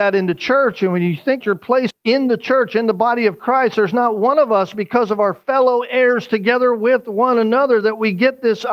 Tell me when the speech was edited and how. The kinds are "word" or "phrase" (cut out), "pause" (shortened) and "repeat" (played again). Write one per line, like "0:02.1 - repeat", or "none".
0:01.4 - word
0:01.9 - word